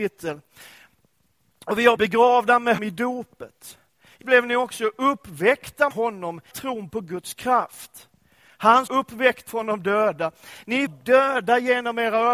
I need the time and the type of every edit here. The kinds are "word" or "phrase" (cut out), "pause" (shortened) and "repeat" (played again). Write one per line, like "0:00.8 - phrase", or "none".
0:02.0 - word
0:02.8 - word
0:04.2 - word
0:05.9 - word
0:06.5 - word
0:08.9 - word
0:09.5 - word
0:10.9 - word